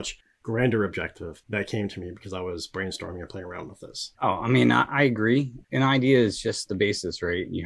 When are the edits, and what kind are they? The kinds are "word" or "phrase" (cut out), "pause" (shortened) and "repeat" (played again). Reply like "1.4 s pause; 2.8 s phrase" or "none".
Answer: 4.1 s pause; 5.6 s pause